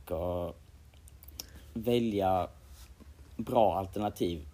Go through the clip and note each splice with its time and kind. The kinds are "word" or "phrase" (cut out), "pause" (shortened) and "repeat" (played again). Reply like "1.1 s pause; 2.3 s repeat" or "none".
3.3 s pause

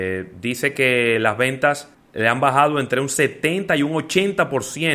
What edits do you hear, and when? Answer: 1.9 s pause

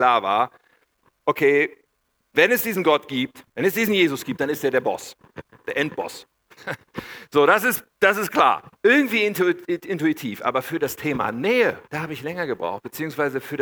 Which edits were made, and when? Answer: 3.5 s pause; 8.7 s pause; 11.8 s pause

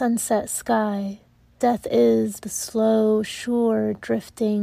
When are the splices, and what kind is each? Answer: 1.6 s word; 2.4 s word

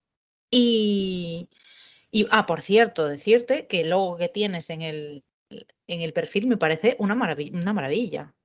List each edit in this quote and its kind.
none

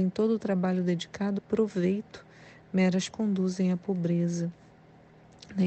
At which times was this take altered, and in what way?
1.4 s word; 3.1 s word

